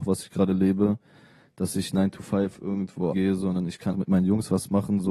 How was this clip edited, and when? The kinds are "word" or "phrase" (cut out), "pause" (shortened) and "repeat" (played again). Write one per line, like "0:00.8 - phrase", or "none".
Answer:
0:01.9 - word
0:03.1 - word
0:03.9 - word